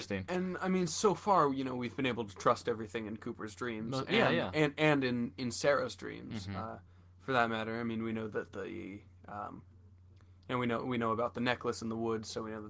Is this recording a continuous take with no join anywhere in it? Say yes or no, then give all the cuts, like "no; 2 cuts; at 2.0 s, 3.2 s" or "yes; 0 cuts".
yes; 0 cuts